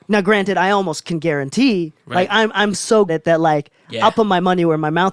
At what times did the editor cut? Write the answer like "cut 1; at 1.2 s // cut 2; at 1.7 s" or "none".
cut 1; at 2.0 s // cut 2; at 3.1 s